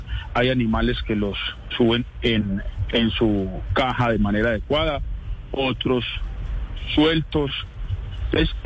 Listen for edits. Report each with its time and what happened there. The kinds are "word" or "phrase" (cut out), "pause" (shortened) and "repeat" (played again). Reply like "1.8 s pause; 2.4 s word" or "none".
none